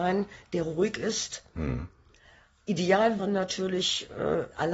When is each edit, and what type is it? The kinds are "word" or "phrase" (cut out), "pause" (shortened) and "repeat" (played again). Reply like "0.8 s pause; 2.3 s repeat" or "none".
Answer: 3.2 s word